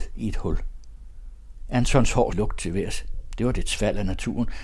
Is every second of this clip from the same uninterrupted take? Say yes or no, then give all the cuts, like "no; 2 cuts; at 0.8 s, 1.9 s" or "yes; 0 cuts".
no; 1 cut; at 2.3 s